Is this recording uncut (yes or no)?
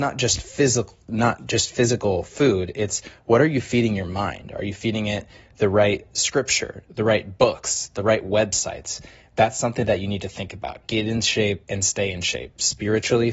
yes